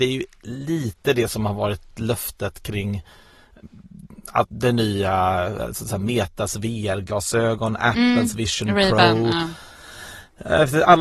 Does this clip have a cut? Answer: no; 0 cuts

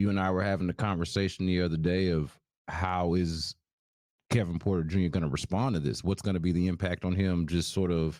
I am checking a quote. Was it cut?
no; 0 cuts

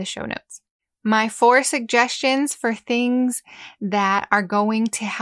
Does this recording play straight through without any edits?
yes; 0 cuts

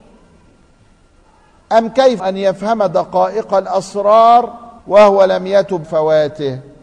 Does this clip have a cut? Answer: yes; 3 cuts; at 2.2 s, 4.8 s, 5.8 s

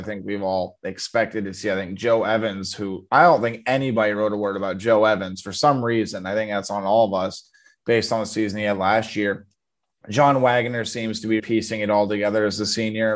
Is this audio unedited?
no; 1 cut; at 11.4 s

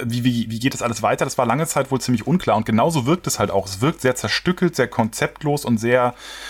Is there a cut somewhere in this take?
no; 0 cuts

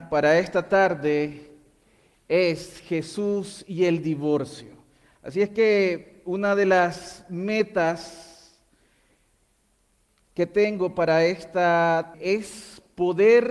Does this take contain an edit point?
yes; 1 cut; at 12.1 s

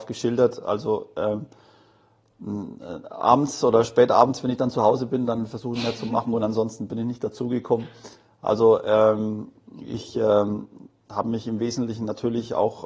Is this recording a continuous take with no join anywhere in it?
no; 1 cut; at 5.8 s

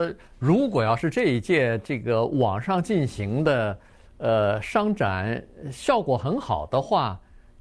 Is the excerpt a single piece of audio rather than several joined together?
yes; 0 cuts

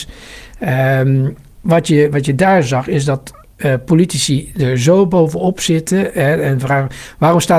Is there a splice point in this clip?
no; 0 cuts

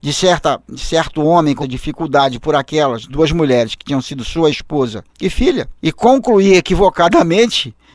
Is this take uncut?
no; 4 cuts; at 1.6 s, 3.1 s, 5.1 s, 5.8 s

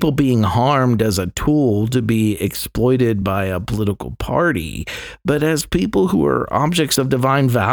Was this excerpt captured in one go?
yes; 0 cuts

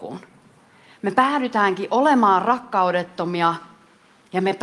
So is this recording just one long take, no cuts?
yes; 0 cuts

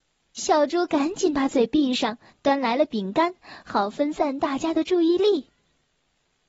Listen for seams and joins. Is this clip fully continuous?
yes; 0 cuts

